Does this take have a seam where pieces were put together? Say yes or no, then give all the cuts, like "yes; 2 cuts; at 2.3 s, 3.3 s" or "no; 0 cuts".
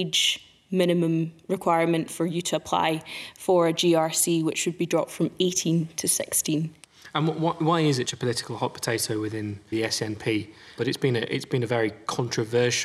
yes; 2 cuts; at 8.1 s, 9.7 s